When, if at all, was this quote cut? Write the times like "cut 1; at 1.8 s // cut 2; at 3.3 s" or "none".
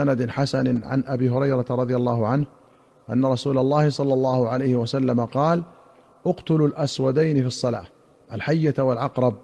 none